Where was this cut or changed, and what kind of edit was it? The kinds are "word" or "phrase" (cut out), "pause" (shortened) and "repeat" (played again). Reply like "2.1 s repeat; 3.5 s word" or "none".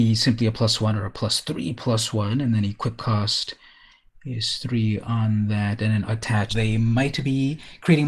6.1 s word; 6.5 s word